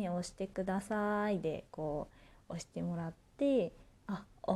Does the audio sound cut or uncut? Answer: uncut